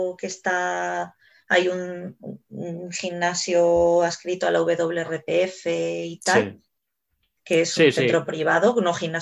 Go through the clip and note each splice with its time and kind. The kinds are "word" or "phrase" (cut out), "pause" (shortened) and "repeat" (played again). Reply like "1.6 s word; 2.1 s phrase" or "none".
none